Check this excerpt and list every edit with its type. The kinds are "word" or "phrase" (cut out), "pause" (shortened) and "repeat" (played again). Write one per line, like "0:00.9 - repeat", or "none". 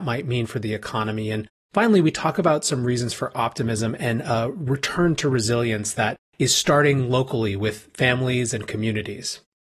none